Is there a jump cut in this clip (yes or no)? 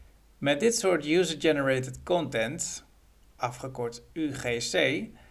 no